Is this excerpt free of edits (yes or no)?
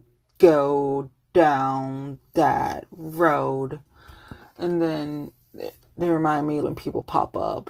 no